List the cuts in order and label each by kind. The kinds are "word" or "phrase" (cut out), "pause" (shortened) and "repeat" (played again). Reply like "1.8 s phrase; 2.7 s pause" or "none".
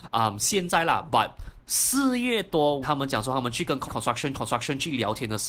2.8 s word; 3.9 s phrase; 4.3 s repeat